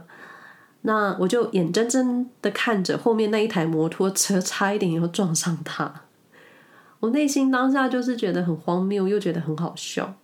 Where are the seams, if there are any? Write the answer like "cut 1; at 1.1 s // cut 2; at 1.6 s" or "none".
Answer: none